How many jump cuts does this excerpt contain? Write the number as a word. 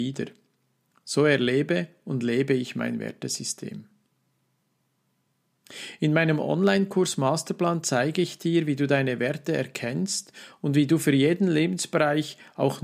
zero